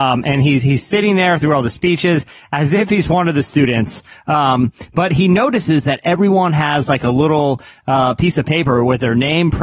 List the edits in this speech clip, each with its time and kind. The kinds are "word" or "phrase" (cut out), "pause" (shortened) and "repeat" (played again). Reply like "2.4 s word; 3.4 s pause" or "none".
none